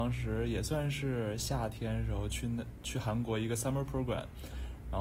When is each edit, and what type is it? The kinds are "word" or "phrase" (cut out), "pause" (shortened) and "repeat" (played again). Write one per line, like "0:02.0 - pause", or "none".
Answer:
none